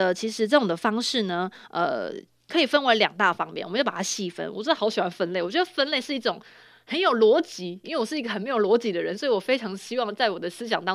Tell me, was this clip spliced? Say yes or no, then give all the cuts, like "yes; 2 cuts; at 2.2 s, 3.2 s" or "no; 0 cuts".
no; 0 cuts